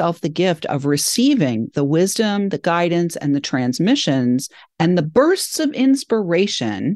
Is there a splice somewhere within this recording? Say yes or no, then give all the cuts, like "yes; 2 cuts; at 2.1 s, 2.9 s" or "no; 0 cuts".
no; 0 cuts